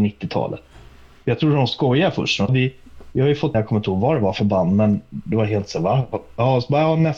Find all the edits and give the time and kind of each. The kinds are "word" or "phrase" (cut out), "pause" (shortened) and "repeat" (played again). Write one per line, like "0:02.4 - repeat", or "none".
0:02.5 - word
0:03.5 - word